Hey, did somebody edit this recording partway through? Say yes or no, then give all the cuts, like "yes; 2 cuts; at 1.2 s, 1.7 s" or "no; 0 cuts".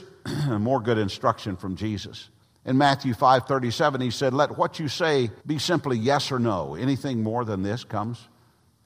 yes; 2 cuts; at 2.4 s, 5.4 s